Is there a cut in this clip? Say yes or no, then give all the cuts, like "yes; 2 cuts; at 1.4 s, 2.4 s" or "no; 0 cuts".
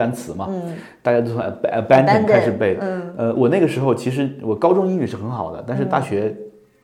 no; 0 cuts